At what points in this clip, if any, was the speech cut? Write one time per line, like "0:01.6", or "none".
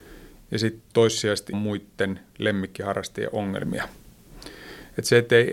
0:01.5